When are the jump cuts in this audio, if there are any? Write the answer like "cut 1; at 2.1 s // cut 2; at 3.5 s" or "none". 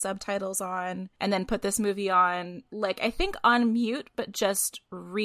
cut 1; at 1.1 s